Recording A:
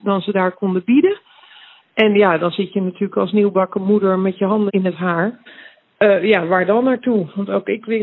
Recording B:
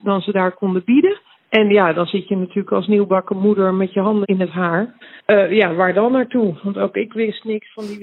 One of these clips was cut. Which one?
B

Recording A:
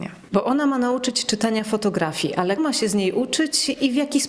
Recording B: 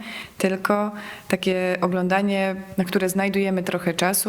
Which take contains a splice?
A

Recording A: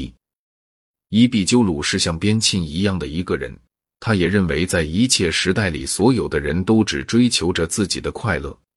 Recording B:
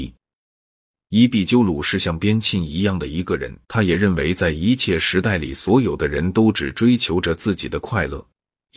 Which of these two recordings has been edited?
B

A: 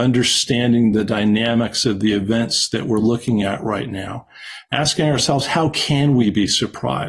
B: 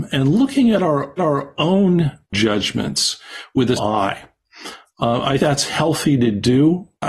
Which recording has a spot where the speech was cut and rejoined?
B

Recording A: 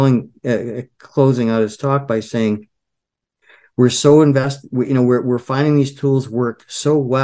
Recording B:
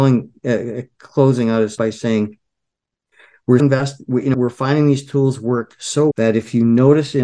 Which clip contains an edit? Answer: B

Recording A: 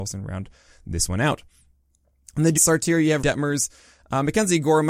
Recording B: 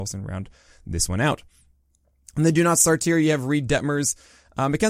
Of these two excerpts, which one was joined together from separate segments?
A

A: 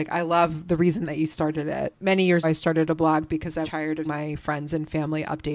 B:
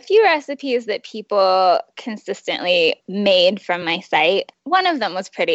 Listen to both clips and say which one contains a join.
A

